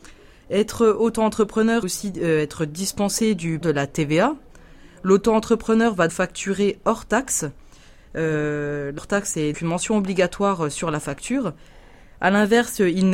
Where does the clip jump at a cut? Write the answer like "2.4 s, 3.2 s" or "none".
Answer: 1.8 s, 3.6 s, 6.1 s, 9.0 s, 9.5 s